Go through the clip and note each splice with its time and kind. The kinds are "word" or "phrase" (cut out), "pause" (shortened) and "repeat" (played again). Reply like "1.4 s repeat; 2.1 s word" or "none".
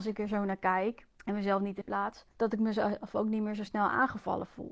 1.1 s pause; 1.8 s word; 2.3 s pause